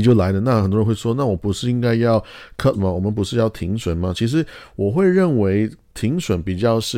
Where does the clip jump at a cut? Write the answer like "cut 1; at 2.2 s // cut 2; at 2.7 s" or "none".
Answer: cut 1; at 2.7 s